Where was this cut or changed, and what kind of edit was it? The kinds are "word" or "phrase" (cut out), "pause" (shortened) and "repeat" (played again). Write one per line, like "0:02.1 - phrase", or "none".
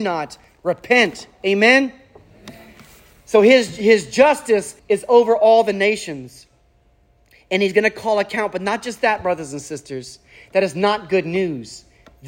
0:04.8 - pause

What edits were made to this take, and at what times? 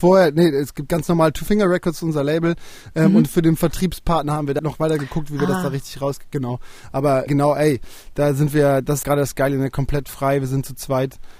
0:04.6 - word
0:07.3 - word
0:09.0 - word

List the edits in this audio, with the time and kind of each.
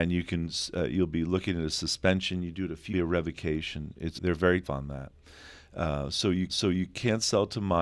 0:02.9 - phrase
0:04.2 - word
0:04.6 - word
0:06.5 - repeat

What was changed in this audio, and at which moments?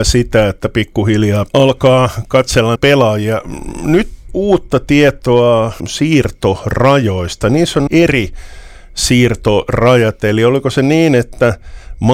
0:01.5 - word
0:02.8 - word
0:04.3 - word
0:05.8 - word
0:07.9 - word

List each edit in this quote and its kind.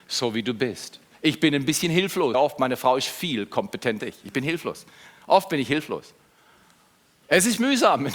0:01.1 - pause
0:02.3 - word
0:04.0 - word

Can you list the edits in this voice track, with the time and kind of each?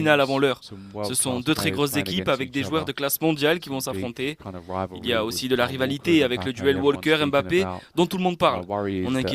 none

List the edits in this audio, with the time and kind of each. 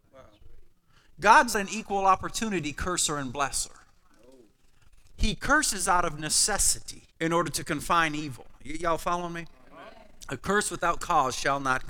0:01.5 - word
0:07.1 - pause

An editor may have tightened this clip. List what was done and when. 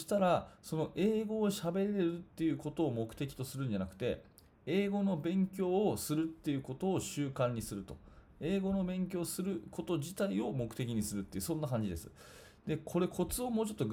none

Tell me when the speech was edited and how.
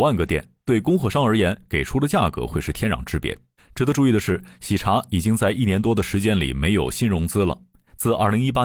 0:03.6 - pause

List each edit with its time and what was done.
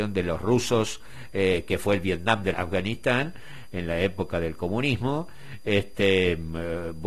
0:02.5 - phrase

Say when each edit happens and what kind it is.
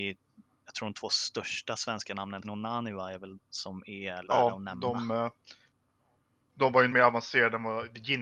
0:02.4 - word
0:03.3 - word
0:04.2 - word
0:06.9 - word

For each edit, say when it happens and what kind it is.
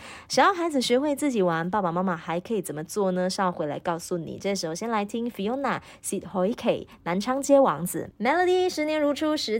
0:08.1 - word

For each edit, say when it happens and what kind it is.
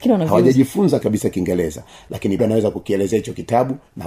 0:01.0 - word
0:02.4 - word

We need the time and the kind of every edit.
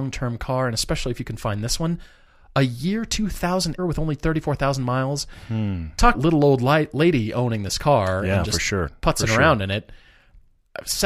0:03.8 - word
0:06.1 - word

